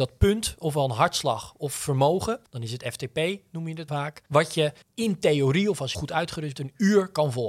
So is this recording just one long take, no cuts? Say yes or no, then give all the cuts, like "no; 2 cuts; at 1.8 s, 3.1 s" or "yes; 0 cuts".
no; 6 cuts; at 2.5 s, 3.9 s, 4.3 s, 4.8 s, 5.9 s, 6.6 s